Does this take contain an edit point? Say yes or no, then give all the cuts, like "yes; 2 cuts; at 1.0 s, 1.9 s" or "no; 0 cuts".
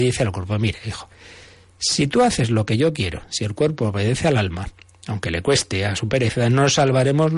no; 0 cuts